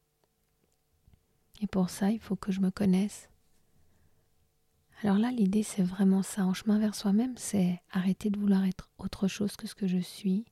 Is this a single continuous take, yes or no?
yes